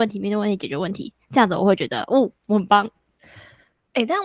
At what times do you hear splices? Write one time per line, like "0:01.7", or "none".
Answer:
0:01.2
0:02.4